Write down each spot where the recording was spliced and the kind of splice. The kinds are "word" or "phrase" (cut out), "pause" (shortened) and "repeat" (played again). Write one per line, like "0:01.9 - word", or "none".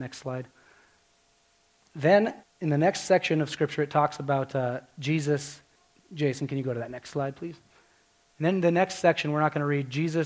0:02.4 - pause
0:05.8 - pause